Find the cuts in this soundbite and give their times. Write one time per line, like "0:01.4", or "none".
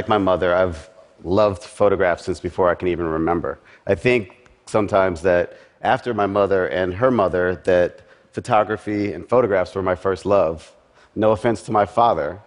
none